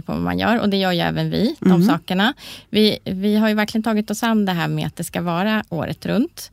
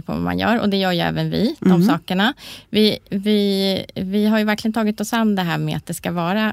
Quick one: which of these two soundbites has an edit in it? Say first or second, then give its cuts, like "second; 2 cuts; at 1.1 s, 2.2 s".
first; 1 cut; at 3.0 s